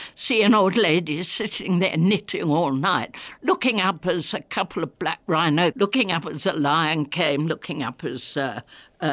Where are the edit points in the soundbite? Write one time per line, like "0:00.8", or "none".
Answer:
0:05.7